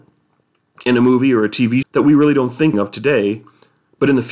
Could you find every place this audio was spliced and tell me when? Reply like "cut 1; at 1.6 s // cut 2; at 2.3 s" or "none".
cut 1; at 1.8 s // cut 2; at 2.7 s